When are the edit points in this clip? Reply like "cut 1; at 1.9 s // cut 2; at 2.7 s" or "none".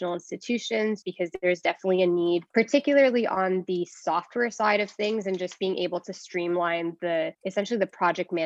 cut 1; at 1.0 s // cut 2; at 2.5 s // cut 3; at 7.3 s